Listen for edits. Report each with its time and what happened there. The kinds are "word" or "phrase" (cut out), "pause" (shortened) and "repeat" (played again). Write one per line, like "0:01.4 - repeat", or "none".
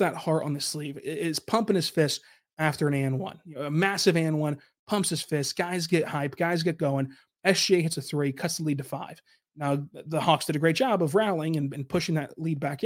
none

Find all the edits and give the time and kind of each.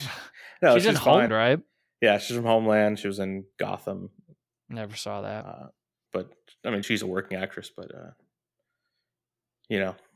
0:01.3 - word
0:06.1 - word
0:06.8 - word

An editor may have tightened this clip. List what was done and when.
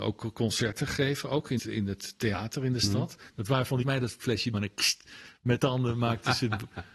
0:01.6 - word
0:03.8 - phrase
0:04.5 - word
0:05.6 - word

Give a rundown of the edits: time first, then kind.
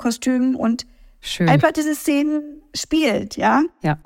none

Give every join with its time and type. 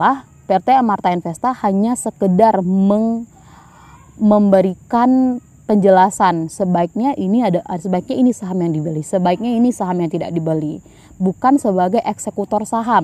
none

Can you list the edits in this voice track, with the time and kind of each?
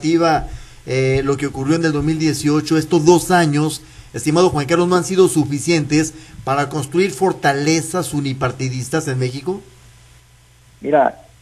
none

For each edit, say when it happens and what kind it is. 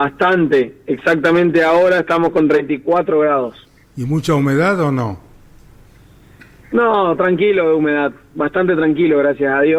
none

